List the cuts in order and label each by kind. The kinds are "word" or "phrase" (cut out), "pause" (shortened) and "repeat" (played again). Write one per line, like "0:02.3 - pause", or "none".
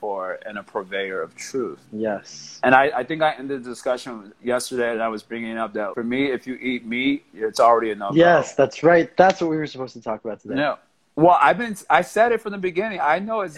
0:01.9 - pause
0:05.9 - word